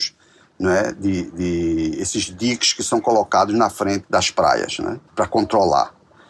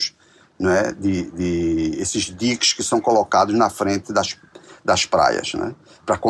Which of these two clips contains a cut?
first; 2 cuts; at 4.0 s, 5.1 s

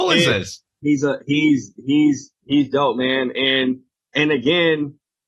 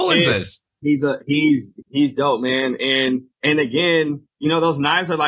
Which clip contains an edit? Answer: second; 3 cuts; at 1.8 s, 3.3 s, 4.3 s

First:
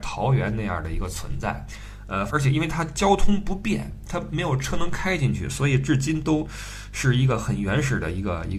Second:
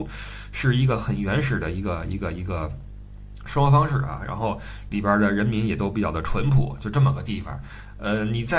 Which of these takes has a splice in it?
first; 1 cut; at 2.3 s

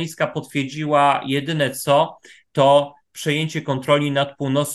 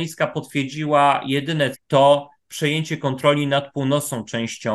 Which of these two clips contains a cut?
second; 1 cut; at 1.7 s

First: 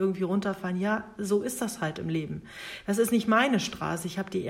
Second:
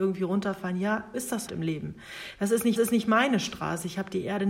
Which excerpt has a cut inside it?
second; 3 cuts; at 1.1 s, 1.5 s, 2.8 s

